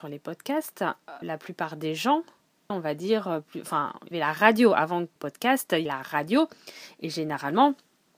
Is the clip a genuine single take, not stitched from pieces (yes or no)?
no